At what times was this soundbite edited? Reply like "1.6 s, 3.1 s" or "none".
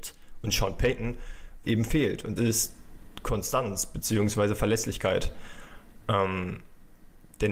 1.6 s, 2.4 s